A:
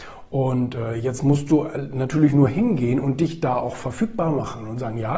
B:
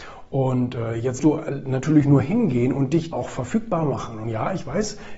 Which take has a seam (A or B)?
B